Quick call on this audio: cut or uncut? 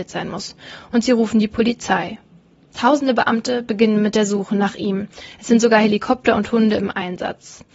cut